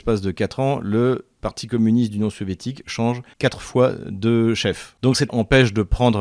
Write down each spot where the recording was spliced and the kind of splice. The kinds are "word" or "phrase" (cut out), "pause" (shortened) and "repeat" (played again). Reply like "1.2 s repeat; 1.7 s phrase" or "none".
1.4 s word; 5.3 s word